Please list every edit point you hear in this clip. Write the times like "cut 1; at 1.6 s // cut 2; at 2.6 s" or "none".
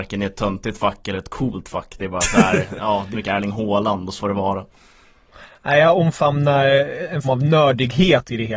cut 1; at 3.1 s // cut 2; at 4.2 s // cut 3; at 7.2 s